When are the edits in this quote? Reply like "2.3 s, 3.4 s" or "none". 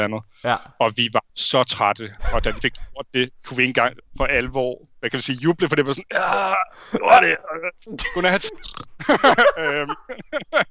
1.3 s, 2.6 s

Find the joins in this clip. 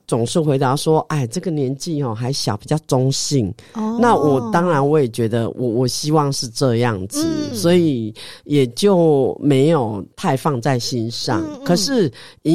7.5 s

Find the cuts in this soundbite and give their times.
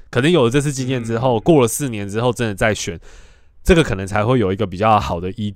none

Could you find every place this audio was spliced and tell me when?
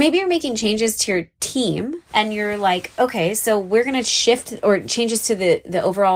2.1 s

